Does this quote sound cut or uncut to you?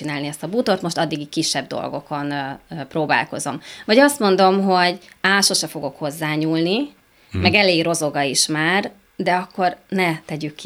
uncut